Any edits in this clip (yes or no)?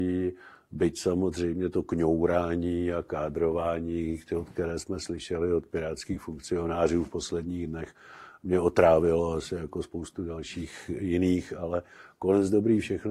no